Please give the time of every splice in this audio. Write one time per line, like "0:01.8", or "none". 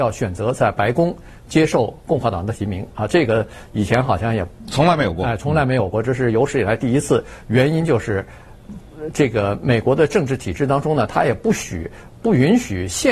none

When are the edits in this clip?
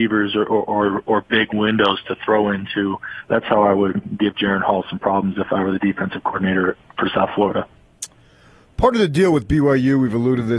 none

